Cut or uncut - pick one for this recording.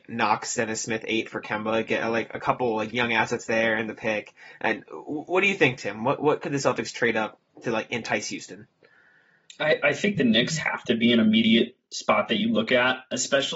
uncut